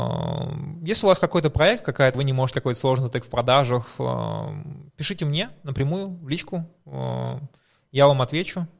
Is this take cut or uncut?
cut